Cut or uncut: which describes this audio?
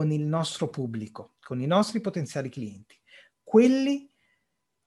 uncut